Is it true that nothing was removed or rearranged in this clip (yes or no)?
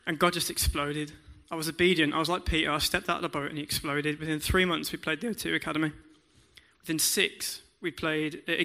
yes